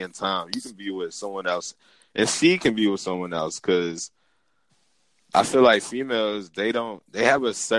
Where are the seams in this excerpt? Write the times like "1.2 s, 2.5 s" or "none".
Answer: none